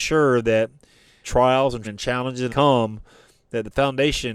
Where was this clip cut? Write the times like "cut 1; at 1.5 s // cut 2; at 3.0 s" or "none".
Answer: cut 1; at 1.2 s // cut 2; at 1.8 s // cut 3; at 2.5 s